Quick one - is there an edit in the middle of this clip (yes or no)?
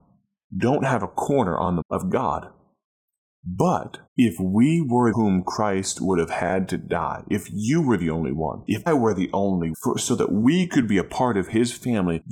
yes